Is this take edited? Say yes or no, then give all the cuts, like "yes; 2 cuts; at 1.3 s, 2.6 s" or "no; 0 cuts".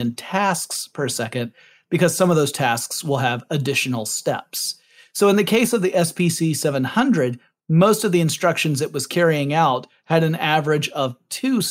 no; 0 cuts